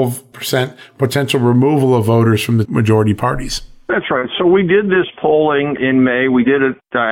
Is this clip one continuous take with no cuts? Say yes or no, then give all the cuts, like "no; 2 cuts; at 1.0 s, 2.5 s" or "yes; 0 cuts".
no; 2 cuts; at 2.7 s, 5.8 s